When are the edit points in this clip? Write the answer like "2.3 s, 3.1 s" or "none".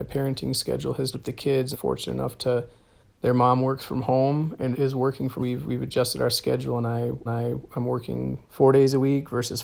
1.1 s, 1.7 s, 3.0 s, 4.7 s, 5.4 s, 7.3 s, 8.5 s